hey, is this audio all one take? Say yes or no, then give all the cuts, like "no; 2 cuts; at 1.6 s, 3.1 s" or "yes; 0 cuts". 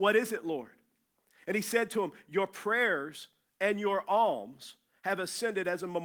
yes; 0 cuts